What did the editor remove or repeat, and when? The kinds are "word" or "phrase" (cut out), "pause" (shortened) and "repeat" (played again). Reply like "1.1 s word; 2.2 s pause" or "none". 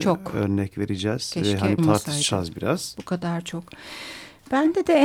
1.8 s word